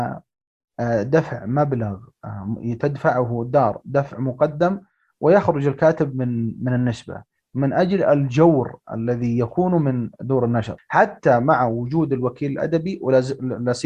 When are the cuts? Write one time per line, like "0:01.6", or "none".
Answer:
none